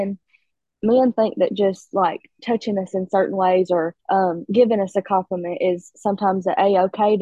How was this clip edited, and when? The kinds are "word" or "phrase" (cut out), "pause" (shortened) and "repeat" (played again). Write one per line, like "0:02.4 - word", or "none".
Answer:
0:04.0 - pause